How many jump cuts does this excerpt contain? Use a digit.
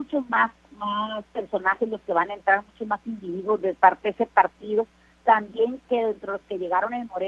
0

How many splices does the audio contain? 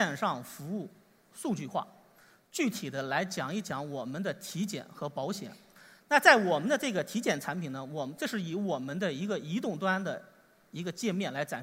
0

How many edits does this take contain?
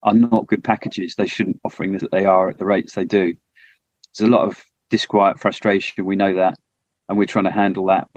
3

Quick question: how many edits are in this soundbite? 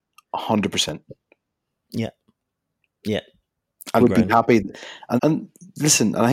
2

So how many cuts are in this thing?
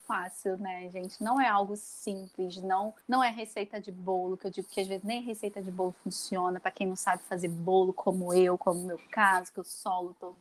1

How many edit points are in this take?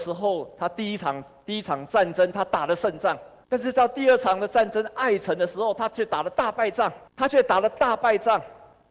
2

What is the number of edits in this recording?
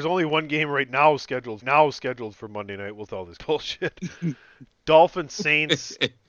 3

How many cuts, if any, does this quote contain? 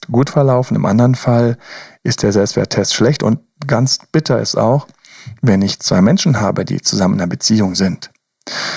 0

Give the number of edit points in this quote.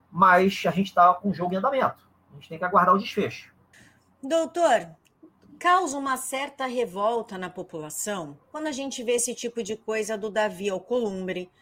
2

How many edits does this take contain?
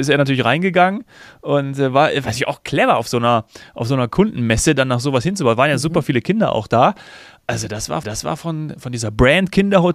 1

